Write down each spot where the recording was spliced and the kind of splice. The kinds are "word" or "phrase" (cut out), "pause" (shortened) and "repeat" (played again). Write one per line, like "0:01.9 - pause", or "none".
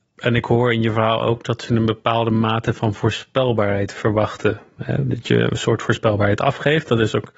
none